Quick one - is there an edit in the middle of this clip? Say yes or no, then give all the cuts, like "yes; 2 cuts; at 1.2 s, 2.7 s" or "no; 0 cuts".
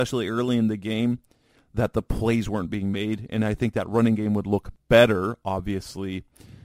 no; 0 cuts